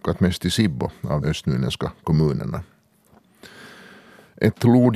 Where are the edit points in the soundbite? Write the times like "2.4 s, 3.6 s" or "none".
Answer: 1.2 s

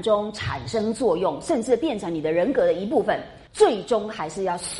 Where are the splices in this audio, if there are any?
3.5 s

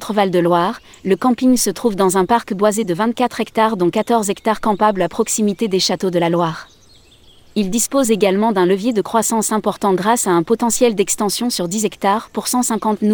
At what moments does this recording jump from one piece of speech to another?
none

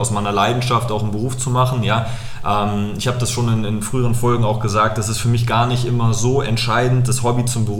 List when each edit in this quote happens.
none

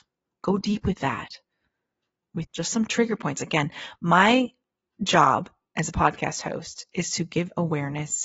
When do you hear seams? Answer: 2.4 s

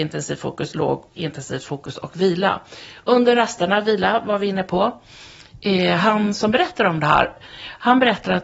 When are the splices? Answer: none

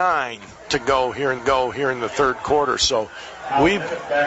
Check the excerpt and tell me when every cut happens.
1.4 s

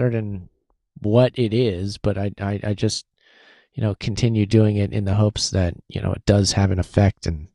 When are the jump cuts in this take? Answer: none

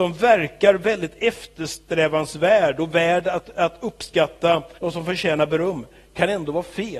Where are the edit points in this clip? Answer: 4.8 s

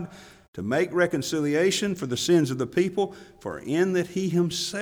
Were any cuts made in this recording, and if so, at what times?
none

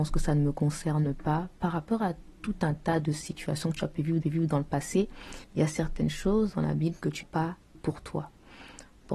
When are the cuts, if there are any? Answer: 4.2 s, 5.4 s, 7.2 s, 7.7 s

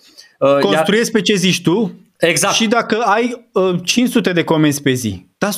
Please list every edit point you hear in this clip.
none

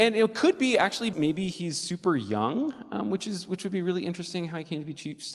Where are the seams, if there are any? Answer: 1.1 s

